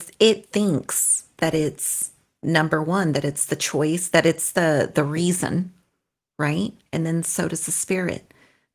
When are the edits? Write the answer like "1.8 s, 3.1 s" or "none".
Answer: none